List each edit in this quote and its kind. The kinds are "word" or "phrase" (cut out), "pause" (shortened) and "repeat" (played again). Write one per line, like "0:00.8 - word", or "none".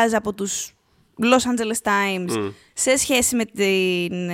none